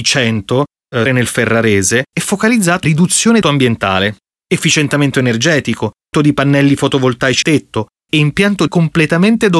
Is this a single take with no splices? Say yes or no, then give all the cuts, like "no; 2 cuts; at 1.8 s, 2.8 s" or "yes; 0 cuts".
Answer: no; 7 cuts; at 1.1 s, 2.8 s, 3.4 s, 6.1 s, 7.4 s, 8.1 s, 8.7 s